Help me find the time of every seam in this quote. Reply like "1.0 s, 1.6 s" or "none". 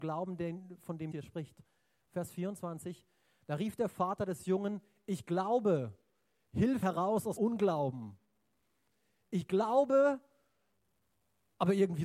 1.1 s, 6.8 s, 7.4 s